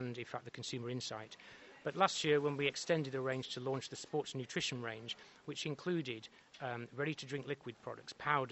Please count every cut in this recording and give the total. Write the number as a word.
zero